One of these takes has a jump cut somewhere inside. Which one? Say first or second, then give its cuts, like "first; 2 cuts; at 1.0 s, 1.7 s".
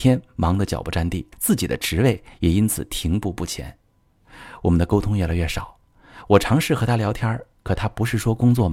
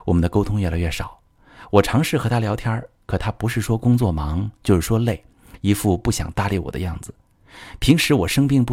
first; 1 cut; at 1.3 s